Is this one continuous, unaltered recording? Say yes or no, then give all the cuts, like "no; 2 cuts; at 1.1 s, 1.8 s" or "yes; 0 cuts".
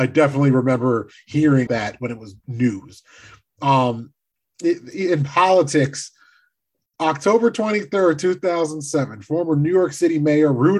no; 2 cuts; at 1.7 s, 2.4 s